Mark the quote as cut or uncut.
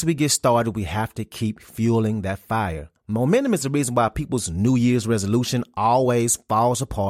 uncut